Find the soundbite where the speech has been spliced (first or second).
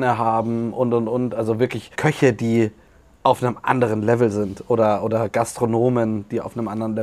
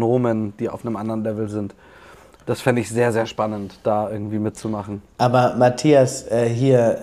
first